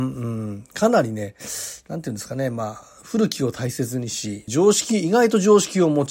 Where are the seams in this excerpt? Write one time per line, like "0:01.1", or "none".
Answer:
0:04.5